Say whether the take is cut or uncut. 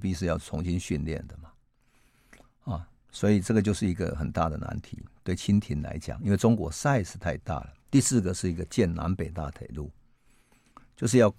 cut